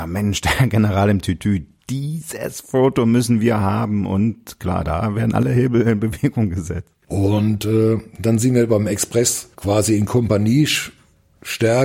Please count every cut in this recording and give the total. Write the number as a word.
one